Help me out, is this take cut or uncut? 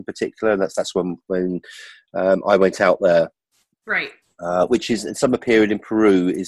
uncut